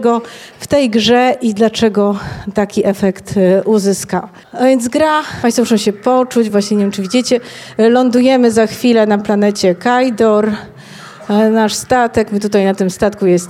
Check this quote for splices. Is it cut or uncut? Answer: uncut